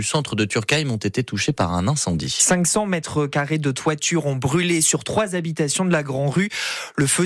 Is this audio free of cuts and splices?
yes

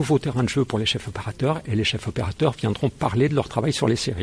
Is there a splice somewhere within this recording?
no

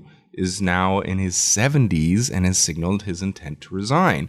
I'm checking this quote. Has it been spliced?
no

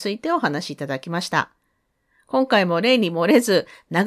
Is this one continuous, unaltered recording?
yes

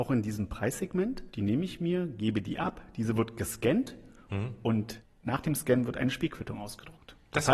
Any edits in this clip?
no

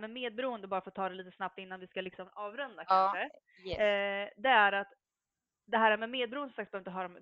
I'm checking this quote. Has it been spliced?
no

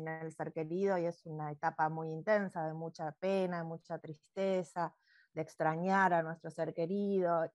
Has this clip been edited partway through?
no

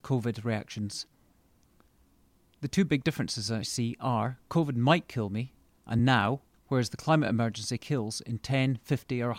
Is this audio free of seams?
yes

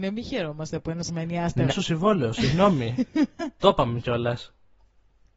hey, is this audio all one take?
no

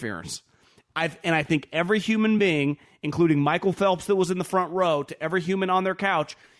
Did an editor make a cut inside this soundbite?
no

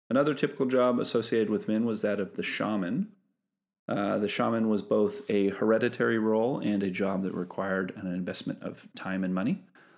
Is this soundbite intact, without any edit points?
yes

